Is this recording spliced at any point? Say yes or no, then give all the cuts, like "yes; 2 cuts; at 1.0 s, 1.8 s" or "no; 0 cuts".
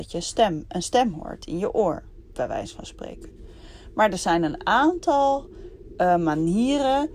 no; 0 cuts